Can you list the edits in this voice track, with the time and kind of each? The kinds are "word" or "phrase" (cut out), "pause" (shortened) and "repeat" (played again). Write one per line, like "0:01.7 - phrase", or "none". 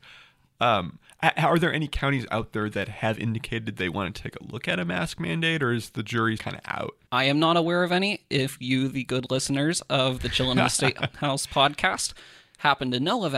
0:06.4 - word
0:07.1 - pause